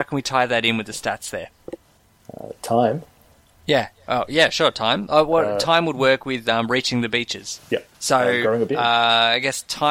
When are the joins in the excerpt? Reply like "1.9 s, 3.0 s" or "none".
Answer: 2.6 s, 7.9 s